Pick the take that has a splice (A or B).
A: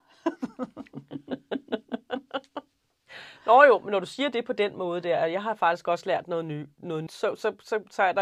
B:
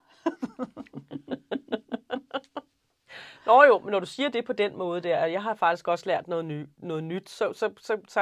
A